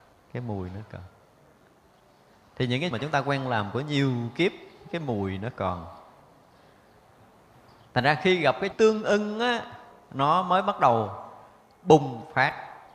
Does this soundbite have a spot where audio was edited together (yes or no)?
yes